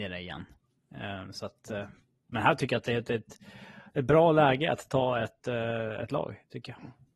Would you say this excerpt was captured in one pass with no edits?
yes; 0 cuts

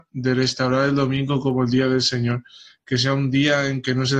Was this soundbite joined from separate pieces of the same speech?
no; 0 cuts

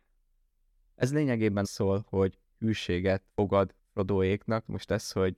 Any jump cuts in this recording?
yes; 2 cuts; at 1.6 s, 3.3 s

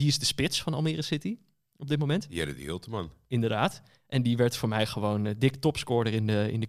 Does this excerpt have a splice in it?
no; 0 cuts

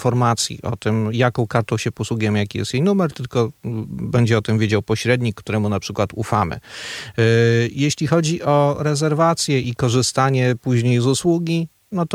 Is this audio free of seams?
yes; 0 cuts

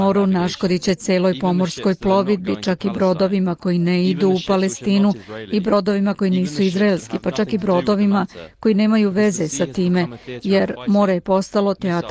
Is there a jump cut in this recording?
no; 0 cuts

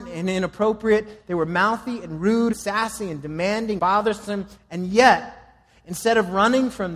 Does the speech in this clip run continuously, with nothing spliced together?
no; 2 cuts; at 2.5 s, 3.8 s

